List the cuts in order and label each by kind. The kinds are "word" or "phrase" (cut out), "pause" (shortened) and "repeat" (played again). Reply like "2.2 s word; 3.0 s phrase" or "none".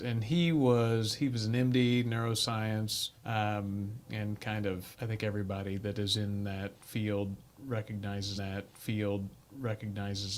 3.1 s pause; 4.9 s pause; 8.4 s repeat